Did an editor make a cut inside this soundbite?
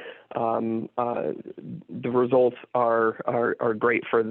no; 0 cuts

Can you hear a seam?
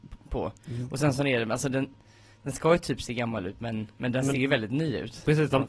no; 0 cuts

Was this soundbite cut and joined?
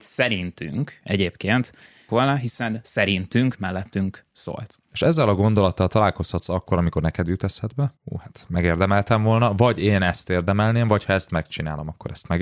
yes; 3 cuts; at 2.1 s, 3.6 s, 8.0 s

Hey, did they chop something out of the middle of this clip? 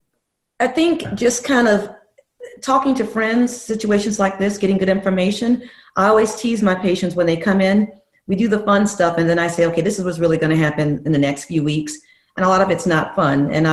no; 0 cuts

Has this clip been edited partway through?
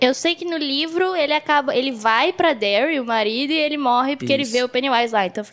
no; 0 cuts

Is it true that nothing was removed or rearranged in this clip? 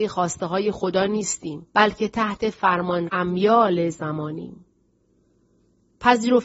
no; 2 cuts; at 1.7 s, 3.1 s

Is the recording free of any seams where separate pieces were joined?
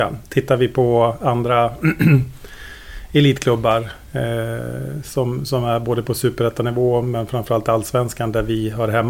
yes; 0 cuts

